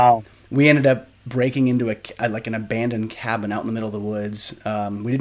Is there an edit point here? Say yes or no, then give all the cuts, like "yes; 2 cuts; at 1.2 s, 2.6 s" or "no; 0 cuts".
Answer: no; 0 cuts